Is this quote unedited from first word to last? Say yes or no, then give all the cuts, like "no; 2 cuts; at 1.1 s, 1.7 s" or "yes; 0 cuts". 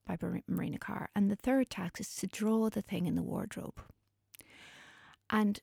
yes; 0 cuts